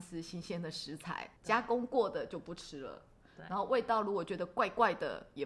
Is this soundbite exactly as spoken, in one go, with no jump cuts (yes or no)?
no